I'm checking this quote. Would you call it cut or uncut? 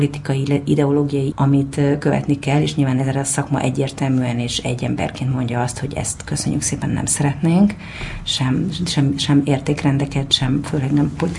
cut